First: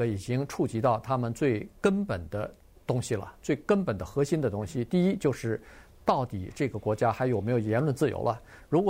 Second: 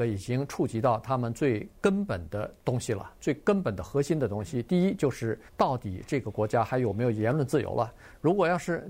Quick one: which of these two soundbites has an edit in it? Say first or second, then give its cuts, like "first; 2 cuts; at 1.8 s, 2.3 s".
second; 2 cuts; at 2.6 s, 5.5 s